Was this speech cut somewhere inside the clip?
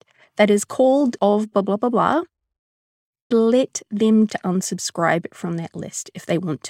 yes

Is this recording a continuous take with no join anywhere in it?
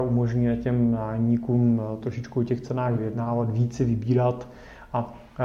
yes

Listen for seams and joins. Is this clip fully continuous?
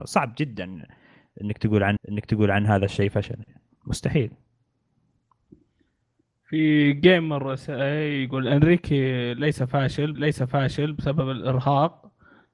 no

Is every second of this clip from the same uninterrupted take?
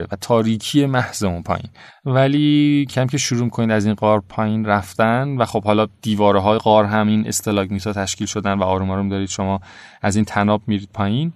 no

